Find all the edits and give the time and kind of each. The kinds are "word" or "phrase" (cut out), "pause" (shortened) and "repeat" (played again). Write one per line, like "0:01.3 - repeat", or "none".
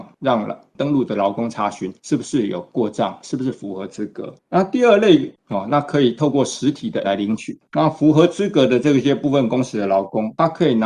0:02.0 - pause
0:07.0 - word